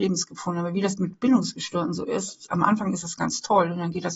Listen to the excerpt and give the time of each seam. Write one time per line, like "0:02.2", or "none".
none